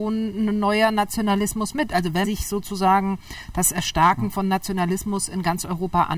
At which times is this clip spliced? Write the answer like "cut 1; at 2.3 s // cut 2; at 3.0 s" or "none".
cut 1; at 2.2 s